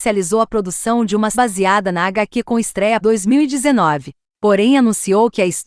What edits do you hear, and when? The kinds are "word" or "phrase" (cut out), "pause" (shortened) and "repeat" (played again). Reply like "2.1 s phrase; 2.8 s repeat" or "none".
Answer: 1.3 s word; 3.0 s word